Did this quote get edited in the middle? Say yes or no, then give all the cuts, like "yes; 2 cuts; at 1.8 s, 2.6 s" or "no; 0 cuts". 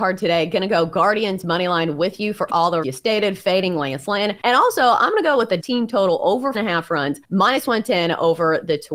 yes; 5 cuts; at 2.8 s, 4.4 s, 5.6 s, 6.5 s, 7.2 s